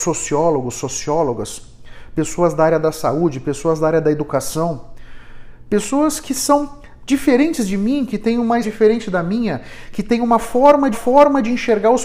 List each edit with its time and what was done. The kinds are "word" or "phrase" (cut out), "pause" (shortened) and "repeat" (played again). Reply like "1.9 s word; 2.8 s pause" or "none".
8.6 s word; 10.9 s repeat